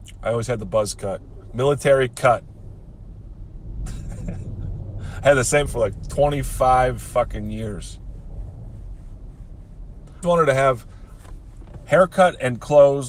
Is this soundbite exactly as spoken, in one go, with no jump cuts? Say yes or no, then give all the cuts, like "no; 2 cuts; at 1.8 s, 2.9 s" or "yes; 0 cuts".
no; 2 cuts; at 5.7 s, 10.2 s